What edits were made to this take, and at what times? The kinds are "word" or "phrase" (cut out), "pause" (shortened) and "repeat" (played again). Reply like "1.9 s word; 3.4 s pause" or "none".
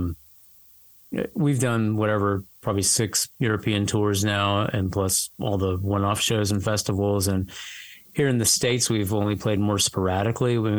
3.3 s pause; 5.3 s pause